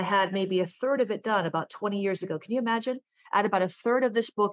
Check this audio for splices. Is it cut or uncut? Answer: uncut